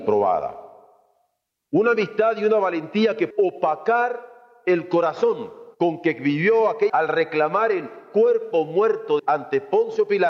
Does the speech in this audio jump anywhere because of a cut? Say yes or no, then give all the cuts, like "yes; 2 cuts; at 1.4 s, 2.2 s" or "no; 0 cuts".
yes; 4 cuts; at 3.3 s, 5.7 s, 6.9 s, 9.2 s